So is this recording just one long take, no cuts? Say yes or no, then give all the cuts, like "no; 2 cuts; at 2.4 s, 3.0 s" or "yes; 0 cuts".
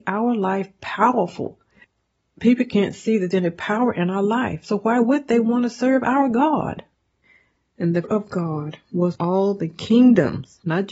no; 3 cuts; at 3.3 s, 8.0 s, 9.1 s